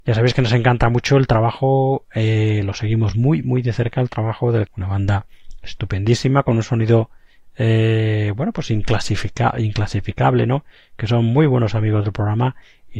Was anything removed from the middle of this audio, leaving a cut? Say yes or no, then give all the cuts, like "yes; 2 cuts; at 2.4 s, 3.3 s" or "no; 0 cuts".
yes; 1 cut; at 4.7 s